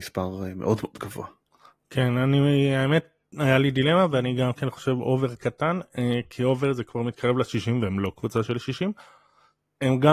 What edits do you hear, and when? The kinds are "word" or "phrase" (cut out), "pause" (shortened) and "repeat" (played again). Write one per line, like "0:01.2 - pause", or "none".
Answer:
none

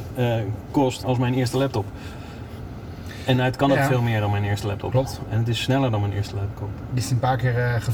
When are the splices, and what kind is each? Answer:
0:01.0 - word
0:07.0 - word

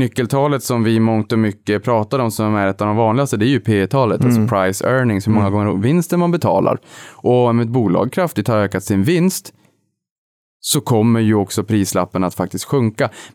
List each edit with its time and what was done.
none

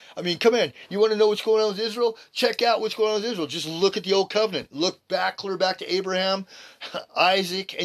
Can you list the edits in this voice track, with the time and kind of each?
none

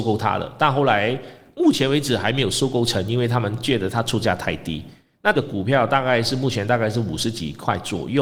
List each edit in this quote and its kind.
0:05.3 - word

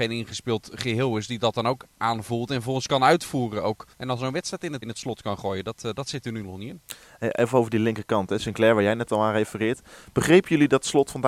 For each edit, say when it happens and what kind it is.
0:03.9 - pause
0:04.8 - word

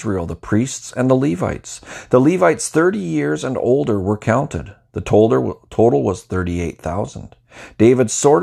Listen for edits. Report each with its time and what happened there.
none

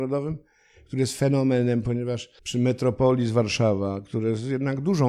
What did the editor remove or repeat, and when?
0:02.4 - pause

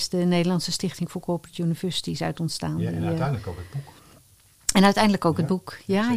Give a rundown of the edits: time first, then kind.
none

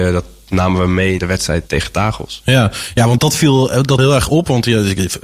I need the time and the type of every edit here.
0:01.2 - word
0:01.7 - word
0:03.2 - word
0:04.0 - word

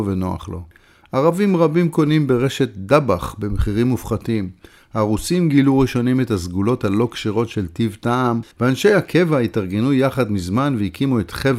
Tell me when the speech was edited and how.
0:08.5 - pause

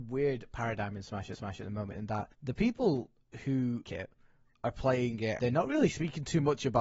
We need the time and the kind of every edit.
0:01.3 - repeat
0:02.3 - pause
0:03.9 - word
0:05.4 - word

